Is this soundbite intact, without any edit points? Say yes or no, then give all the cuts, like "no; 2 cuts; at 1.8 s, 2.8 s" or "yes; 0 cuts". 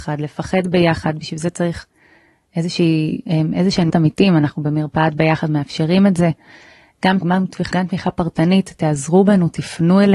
no; 3 cuts; at 3.9 s, 7.2 s, 7.7 s